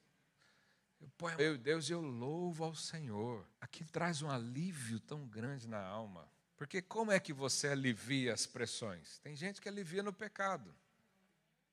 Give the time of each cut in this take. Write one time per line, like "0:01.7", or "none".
0:01.4
0:03.5
0:06.4